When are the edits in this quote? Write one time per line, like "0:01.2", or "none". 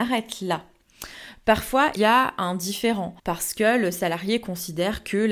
0:02.0
0:03.2